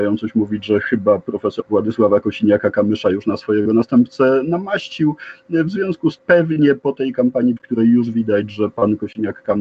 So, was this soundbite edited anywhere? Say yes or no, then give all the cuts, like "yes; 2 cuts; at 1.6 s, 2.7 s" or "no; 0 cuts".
yes; 3 cuts; at 1.6 s, 6.2 s, 7.6 s